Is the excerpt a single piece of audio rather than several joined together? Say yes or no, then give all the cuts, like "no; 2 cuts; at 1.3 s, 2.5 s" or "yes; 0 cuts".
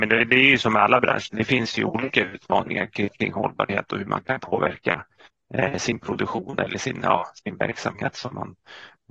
yes; 0 cuts